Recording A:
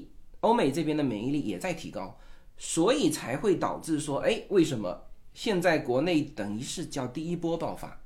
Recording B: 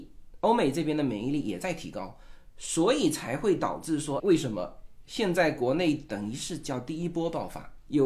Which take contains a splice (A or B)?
B